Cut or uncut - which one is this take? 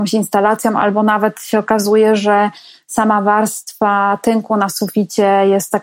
uncut